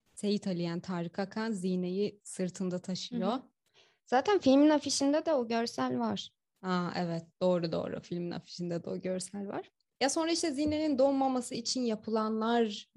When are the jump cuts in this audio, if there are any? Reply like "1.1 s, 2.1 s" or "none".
none